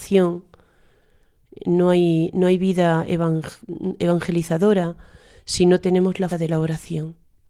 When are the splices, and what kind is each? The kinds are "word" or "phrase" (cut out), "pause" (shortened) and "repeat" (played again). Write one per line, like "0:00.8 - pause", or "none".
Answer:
0:06.3 - word